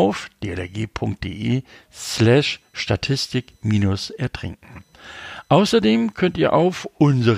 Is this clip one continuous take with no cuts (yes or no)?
yes